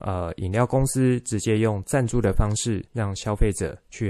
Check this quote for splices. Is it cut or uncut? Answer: cut